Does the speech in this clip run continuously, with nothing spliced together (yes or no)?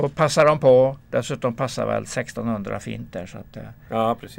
yes